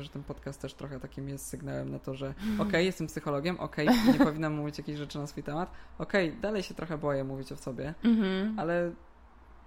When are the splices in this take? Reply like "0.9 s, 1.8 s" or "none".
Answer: none

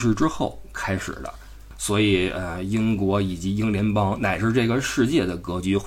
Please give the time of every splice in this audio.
none

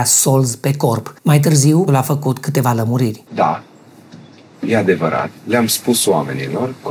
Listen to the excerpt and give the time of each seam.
1.2 s, 1.9 s, 3.3 s, 5.4 s

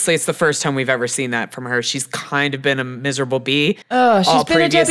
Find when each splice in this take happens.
3.8 s

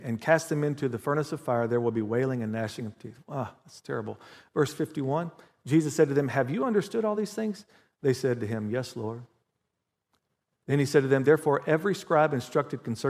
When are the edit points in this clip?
none

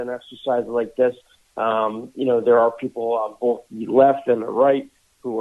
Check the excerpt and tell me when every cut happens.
none

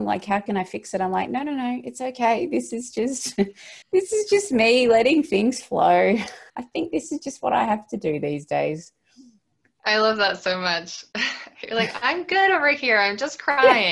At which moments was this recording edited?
3.8 s, 6.5 s, 9.5 s

